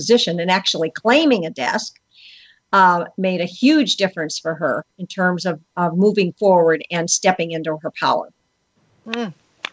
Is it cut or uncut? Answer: uncut